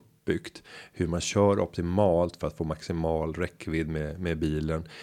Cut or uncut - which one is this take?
uncut